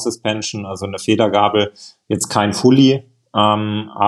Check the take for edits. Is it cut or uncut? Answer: uncut